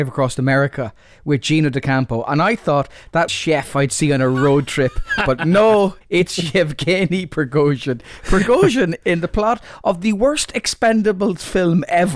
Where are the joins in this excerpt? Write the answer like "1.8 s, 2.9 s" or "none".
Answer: 3.3 s, 6.0 s